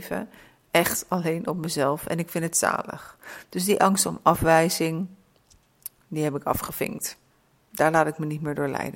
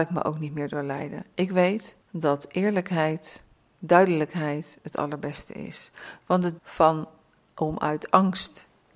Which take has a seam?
second; 3 cuts; at 2.0 s, 3.6 s, 6.6 s

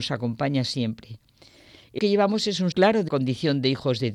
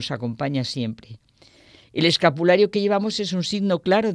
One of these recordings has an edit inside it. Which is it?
first; 3 cuts; at 2.0 s, 2.7 s, 3.1 s

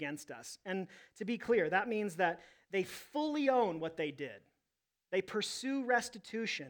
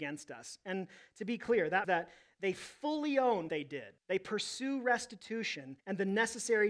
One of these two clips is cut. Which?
second; 4 cuts; at 1.8 s, 3.5 s, 4.0 s, 5.8 s

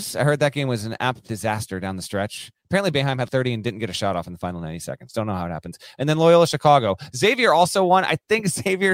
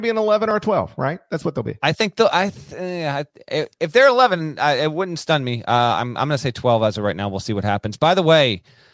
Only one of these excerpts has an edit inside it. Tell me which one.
first; 3 cuts; at 1.3 s, 2.9 s, 3.3 s

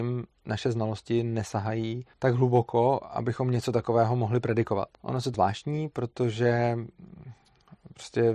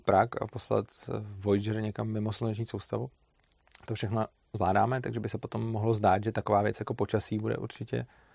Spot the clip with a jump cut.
first; 3 cuts; at 2.1 s, 4.9 s, 5.3 s

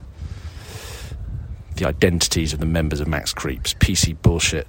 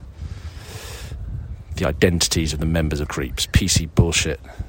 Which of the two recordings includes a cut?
second; 1 cut; at 3.1 s

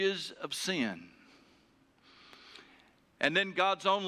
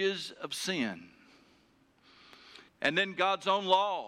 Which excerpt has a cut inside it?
second; 1 cut; at 2.7 s

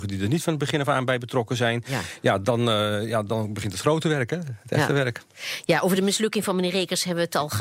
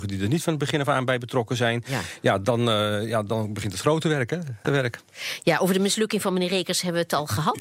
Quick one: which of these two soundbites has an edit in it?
second; 1 cut; at 4.6 s

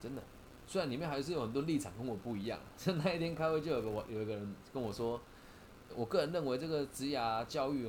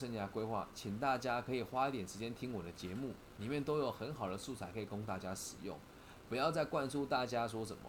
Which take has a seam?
first; 1 cut; at 5.9 s

